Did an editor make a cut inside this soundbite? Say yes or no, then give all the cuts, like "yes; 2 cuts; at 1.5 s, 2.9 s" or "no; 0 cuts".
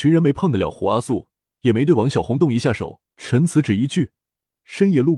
yes; 2 cuts; at 1.5 s, 3.1 s